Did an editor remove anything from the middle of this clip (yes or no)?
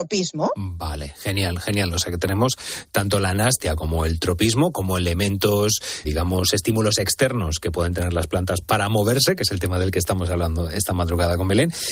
yes